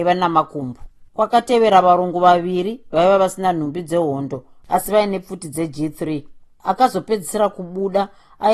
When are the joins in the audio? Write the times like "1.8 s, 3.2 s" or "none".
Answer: 1.1 s, 6.5 s